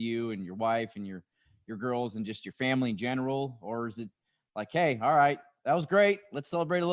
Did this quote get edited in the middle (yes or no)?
no